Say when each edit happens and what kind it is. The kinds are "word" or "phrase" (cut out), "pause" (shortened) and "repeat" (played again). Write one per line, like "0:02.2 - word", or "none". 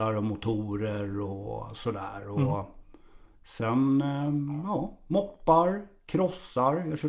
none